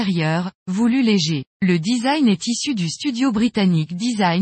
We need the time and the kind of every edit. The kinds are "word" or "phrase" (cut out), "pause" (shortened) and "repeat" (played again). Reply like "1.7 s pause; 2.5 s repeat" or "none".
1.5 s pause